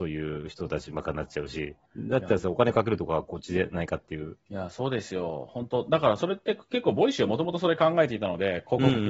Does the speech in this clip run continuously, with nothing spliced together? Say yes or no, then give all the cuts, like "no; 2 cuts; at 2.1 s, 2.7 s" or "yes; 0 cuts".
no; 2 cuts; at 1.9 s, 4.4 s